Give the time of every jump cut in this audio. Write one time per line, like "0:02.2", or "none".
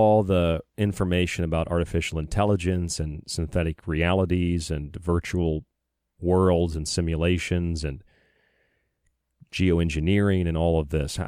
none